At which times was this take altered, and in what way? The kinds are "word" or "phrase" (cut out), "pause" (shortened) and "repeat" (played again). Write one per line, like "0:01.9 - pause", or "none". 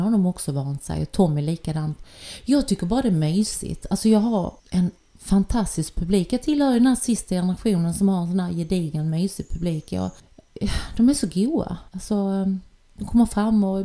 0:04.6 - pause
0:11.9 - pause